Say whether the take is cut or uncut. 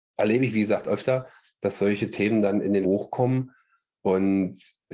cut